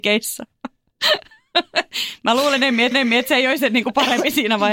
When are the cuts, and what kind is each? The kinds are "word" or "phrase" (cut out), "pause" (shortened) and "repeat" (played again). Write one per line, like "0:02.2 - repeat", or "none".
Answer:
0:02.9 - repeat
0:03.6 - word